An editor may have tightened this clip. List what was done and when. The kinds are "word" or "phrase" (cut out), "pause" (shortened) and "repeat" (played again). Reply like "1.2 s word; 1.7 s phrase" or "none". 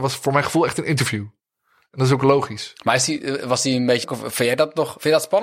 4.0 s word